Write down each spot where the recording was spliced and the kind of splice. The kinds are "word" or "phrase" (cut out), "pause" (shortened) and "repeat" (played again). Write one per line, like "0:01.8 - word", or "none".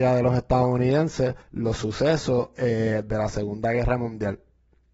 0:01.4 - pause

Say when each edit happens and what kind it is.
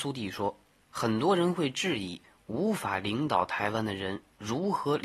none

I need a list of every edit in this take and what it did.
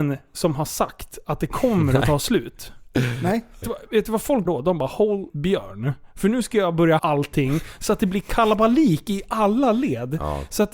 0:03.6 - word
0:04.5 - word
0:05.3 - word
0:07.0 - word

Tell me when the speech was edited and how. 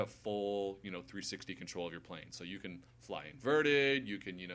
0:02.9 - pause

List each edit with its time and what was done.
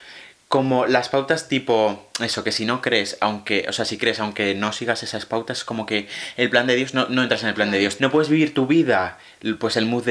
0:08.0 - word

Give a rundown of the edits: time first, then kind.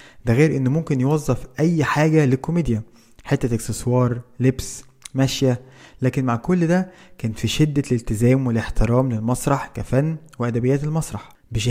none

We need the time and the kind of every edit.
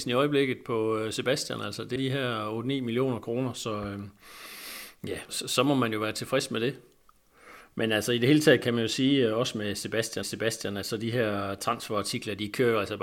0:02.0 - word
0:05.3 - word
0:10.2 - repeat

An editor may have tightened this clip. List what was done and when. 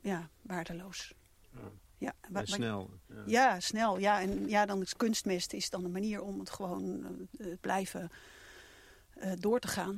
0:07.6 - word

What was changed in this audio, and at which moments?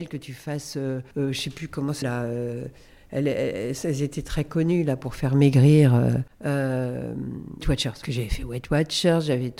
0:01.1 - pause
0:02.0 - word
0:07.6 - word
0:08.0 - phrase

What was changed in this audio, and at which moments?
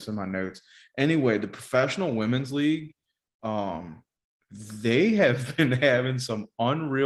none

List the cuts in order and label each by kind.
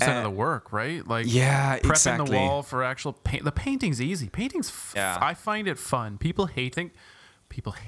0:04.9 - word
0:06.7 - phrase

